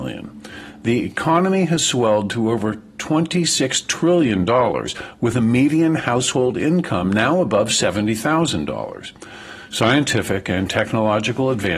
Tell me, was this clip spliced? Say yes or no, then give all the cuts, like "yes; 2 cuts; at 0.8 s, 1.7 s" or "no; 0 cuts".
no; 0 cuts